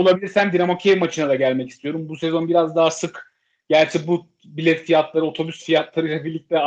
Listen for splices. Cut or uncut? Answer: uncut